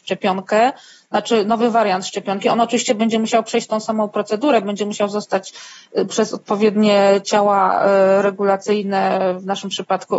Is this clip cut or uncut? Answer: uncut